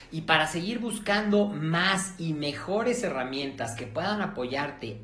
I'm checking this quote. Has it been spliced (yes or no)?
no